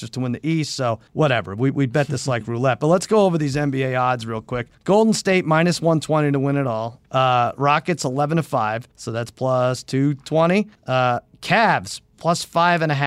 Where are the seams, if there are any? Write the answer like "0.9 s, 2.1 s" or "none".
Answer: 1.1 s, 4.7 s, 7.1 s, 8.9 s, 10.7 s, 12.1 s